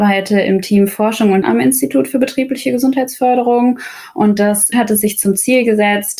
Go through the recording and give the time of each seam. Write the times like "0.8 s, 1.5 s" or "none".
1.4 s, 4.7 s